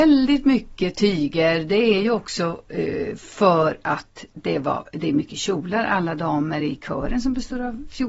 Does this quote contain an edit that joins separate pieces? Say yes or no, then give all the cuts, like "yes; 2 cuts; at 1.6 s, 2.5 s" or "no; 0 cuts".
no; 0 cuts